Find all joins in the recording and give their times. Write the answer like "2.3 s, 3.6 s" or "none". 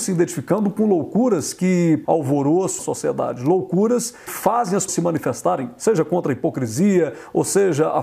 2.0 s, 2.8 s, 4.3 s, 4.9 s